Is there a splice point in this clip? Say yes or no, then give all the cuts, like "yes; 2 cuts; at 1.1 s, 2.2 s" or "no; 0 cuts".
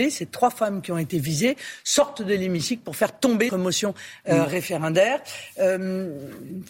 yes; 1 cut; at 3.5 s